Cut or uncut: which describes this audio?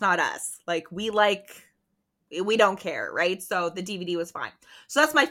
uncut